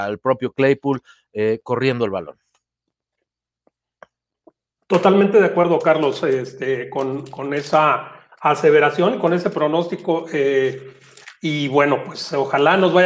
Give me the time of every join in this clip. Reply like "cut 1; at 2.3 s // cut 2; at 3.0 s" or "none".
none

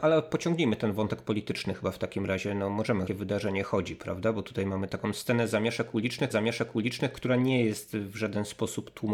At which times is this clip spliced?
cut 1; at 3.1 s // cut 2; at 4.9 s // cut 3; at 6.3 s

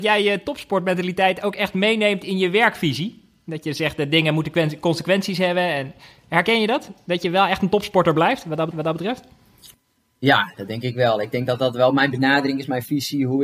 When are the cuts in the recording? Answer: cut 1; at 8.7 s

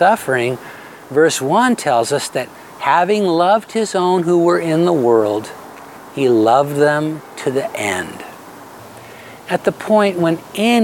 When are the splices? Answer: none

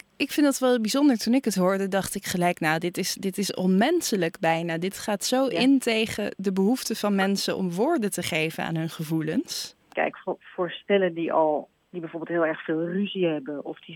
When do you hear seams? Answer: cut 1; at 9.8 s

